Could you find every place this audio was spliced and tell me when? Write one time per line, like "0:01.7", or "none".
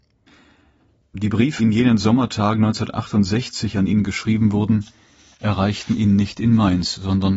0:01.6